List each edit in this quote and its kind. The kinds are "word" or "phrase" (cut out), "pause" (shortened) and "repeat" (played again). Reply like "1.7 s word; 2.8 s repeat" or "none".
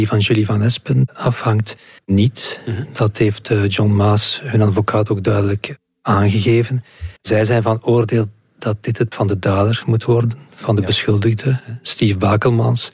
2.0 s pause; 7.2 s pause; 9.1 s word